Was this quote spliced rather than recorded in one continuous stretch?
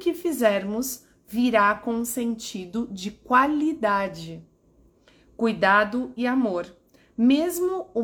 no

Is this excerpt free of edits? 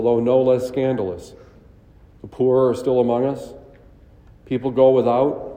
yes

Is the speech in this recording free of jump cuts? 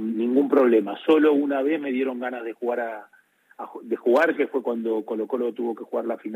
yes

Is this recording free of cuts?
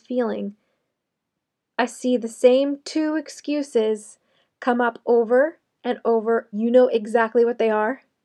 no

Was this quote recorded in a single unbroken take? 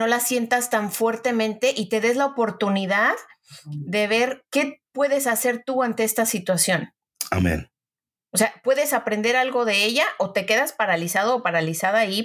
yes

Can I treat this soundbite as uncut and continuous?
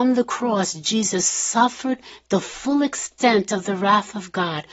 yes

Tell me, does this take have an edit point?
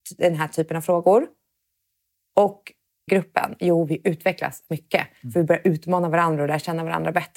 yes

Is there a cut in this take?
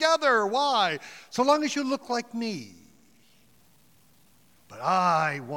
no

